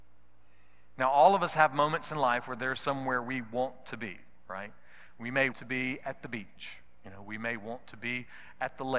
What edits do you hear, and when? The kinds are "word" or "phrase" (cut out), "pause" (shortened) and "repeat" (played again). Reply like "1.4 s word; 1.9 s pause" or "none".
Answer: 5.5 s word